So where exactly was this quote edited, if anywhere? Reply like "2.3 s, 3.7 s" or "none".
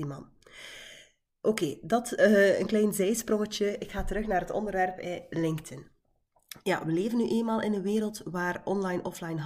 none